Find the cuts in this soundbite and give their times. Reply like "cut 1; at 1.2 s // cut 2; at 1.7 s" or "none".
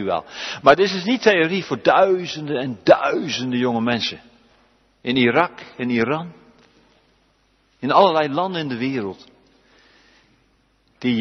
none